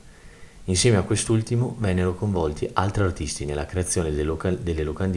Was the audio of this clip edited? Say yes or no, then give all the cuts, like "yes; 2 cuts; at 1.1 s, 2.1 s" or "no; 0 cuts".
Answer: no; 0 cuts